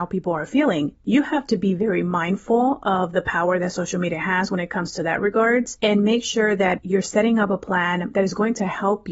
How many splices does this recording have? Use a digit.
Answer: 0